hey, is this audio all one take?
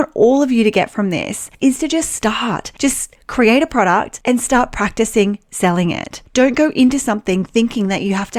yes; 0 cuts

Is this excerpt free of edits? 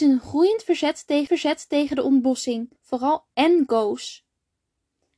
no; 2 cuts; at 1.3 s, 2.8 s

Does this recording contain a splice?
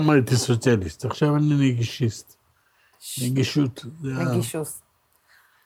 no; 0 cuts

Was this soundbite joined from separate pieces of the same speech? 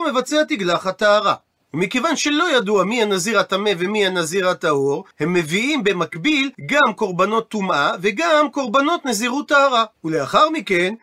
yes; 3 cuts; at 5.1 s, 6.5 s, 10.0 s

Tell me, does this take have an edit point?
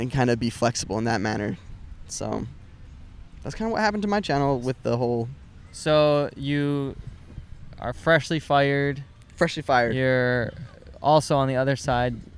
no; 0 cuts

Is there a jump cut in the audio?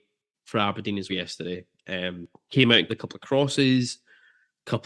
yes; 3 cuts; at 1.1 s, 2.3 s, 2.9 s

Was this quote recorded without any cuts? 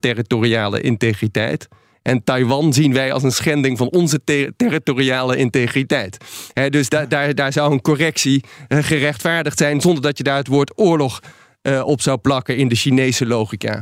yes; 0 cuts

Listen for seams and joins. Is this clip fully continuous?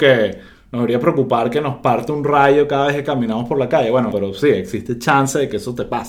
no; 1 cut; at 4.1 s

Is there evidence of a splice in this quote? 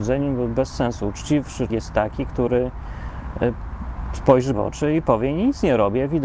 yes; 2 cuts; at 1.7 s, 4.5 s

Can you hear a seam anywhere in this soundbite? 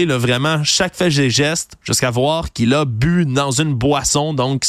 no; 0 cuts

